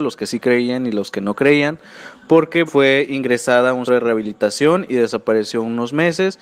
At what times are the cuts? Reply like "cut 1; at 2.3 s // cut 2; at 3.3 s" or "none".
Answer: cut 1; at 2.7 s // cut 2; at 3.9 s